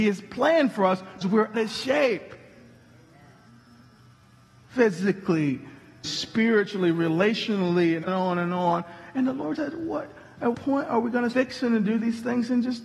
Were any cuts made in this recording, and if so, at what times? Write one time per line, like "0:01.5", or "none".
0:01.2
0:01.5
0:06.0
0:08.1
0:09.6
0:10.5
0:11.3